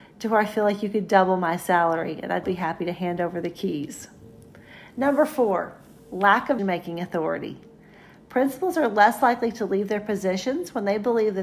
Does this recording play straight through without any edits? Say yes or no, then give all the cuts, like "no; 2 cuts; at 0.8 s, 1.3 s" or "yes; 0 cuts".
no; 2 cuts; at 2.4 s, 6.6 s